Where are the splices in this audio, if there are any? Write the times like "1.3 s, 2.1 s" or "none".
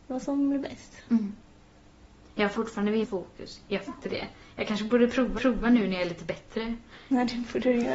2.5 s, 3.0 s, 3.9 s, 5.4 s